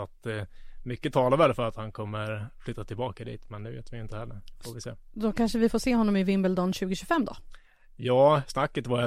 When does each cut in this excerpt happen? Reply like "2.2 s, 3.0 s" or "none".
none